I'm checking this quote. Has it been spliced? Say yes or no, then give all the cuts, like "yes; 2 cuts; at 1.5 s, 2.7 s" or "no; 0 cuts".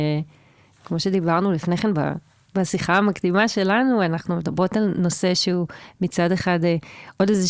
no; 0 cuts